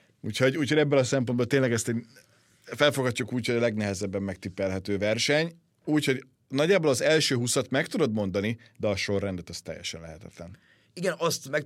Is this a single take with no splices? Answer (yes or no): yes